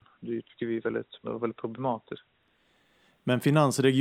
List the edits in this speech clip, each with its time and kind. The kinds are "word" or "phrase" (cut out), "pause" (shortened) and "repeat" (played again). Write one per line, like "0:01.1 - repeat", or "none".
0:01.2 - word